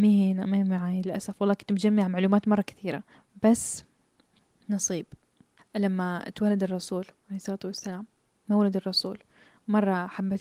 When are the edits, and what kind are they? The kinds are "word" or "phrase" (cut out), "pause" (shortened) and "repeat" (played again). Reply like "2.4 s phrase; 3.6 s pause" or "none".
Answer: 3.1 s pause; 5.6 s word; 8.2 s pause